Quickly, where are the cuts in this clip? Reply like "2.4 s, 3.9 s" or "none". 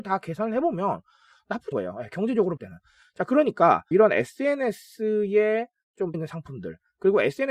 1.7 s, 2.6 s, 3.9 s, 6.1 s